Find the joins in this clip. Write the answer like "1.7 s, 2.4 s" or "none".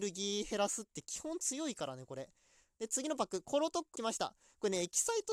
3.9 s